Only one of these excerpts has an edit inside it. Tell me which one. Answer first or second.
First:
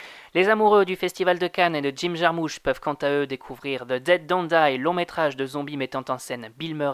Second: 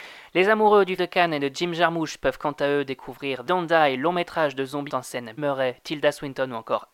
second